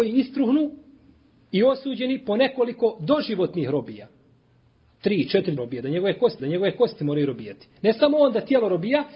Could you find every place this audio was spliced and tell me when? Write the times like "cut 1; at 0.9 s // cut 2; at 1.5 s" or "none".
cut 1; at 5.6 s // cut 2; at 6.4 s